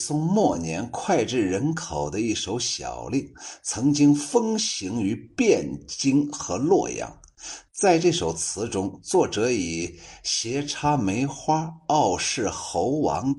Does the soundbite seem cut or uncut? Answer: cut